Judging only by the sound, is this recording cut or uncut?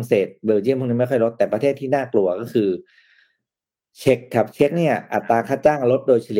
uncut